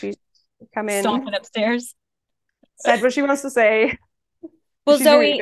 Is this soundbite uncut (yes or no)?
yes